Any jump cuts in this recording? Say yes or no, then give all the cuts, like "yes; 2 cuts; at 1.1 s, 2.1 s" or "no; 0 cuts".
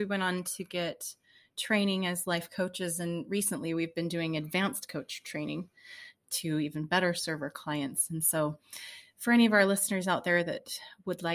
no; 0 cuts